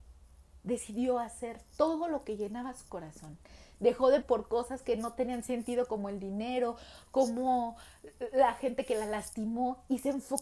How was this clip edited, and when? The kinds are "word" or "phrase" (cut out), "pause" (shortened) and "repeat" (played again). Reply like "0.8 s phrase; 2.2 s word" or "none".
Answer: 4.2 s word